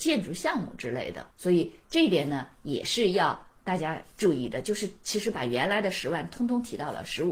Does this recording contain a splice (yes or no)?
yes